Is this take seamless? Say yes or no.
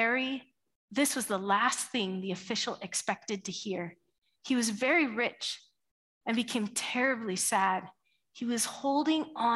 yes